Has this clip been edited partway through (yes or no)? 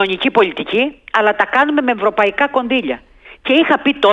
no